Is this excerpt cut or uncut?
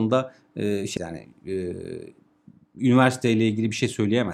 cut